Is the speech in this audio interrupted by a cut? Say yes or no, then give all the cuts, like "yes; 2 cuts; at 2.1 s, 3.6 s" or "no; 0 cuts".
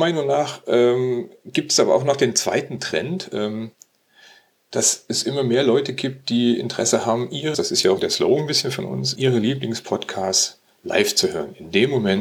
yes; 4 cuts; at 7.5 s, 8.0 s, 9.2 s, 10.8 s